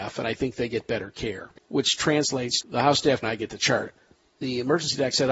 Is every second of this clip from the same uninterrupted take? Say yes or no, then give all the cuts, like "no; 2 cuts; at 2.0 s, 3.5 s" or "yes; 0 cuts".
no; 4 cuts; at 1.6 s, 2.6 s, 3.2 s, 3.9 s